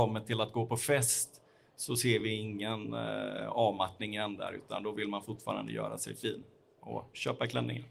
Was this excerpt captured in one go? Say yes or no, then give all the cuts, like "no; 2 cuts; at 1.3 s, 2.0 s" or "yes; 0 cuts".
yes; 0 cuts